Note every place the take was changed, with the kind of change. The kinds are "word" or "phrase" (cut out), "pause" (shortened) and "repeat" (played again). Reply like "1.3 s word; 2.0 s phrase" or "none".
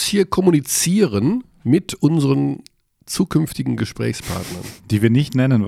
none